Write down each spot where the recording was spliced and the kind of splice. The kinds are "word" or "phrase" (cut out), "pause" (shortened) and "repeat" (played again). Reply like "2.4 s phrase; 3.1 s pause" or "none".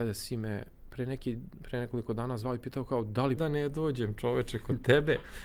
3.4 s phrase